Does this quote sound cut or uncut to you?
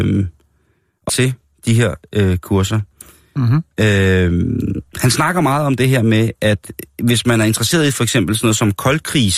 cut